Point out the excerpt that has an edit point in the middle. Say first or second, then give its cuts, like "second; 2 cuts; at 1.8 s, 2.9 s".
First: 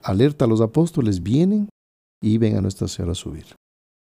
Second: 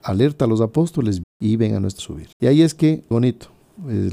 second; 4 cuts; at 1.2 s, 2.0 s, 2.3 s, 3.1 s